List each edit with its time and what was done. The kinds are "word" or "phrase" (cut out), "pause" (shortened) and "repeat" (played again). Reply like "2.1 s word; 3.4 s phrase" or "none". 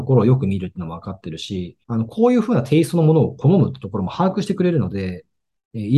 1.8 s pause